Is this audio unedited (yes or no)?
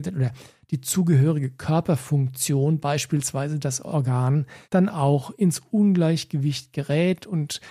no